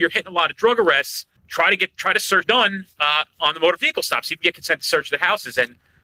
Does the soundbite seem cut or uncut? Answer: cut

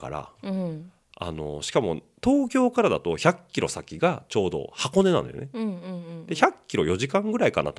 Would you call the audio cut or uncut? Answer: uncut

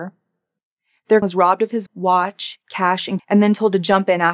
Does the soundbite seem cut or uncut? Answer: cut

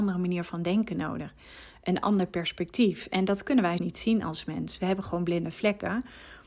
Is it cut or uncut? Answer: cut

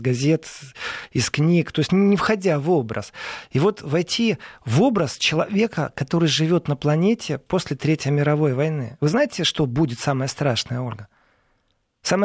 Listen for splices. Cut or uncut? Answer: uncut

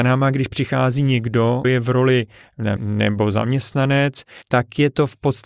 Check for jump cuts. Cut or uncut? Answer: cut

